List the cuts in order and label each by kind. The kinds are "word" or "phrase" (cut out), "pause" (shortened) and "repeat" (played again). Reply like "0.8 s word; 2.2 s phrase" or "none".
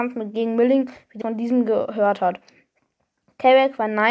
1.2 s word